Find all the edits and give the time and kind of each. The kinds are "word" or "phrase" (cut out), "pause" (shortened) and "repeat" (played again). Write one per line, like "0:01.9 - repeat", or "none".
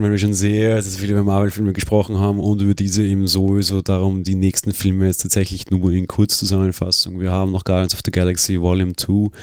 none